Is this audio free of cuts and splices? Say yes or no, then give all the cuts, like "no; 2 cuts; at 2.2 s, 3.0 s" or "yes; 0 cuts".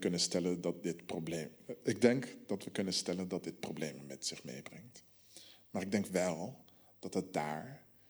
yes; 0 cuts